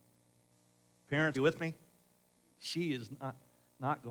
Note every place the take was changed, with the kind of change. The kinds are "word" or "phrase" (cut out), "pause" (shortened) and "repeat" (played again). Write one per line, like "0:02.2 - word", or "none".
0:01.3 - word